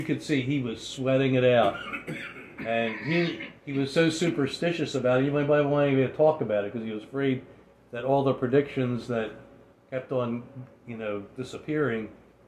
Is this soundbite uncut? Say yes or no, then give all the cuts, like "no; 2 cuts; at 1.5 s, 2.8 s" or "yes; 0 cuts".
yes; 0 cuts